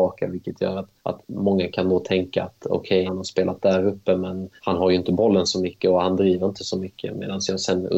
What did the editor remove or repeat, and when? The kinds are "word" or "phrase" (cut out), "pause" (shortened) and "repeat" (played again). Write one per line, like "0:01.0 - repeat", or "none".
0:01.0 - pause
0:03.1 - word
0:04.6 - pause